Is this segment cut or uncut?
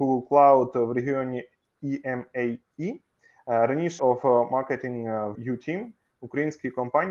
cut